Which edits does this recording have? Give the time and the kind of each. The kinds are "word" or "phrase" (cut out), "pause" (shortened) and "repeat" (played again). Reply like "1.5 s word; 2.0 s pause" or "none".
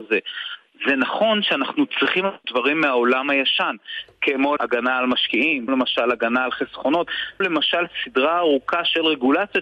2.4 s phrase; 4.6 s word; 5.7 s word; 7.4 s word